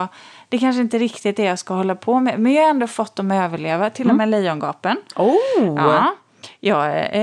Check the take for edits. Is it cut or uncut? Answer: uncut